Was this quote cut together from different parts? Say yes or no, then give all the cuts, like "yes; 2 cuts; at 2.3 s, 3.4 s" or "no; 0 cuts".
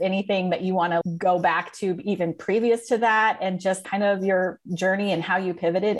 no; 0 cuts